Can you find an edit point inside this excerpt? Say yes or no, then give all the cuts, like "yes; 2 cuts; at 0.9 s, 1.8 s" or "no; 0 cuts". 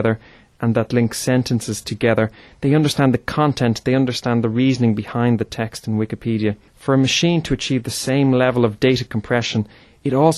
no; 0 cuts